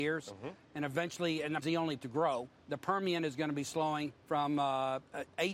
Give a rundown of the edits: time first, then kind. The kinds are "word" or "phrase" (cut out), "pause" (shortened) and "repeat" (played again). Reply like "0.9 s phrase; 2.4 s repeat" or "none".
1.6 s word; 2.0 s word; 2.6 s pause; 4.2 s pause

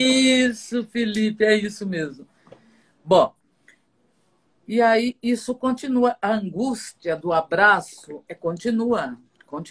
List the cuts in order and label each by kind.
8.3 s word

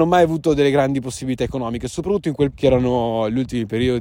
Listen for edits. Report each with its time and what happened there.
2.5 s word

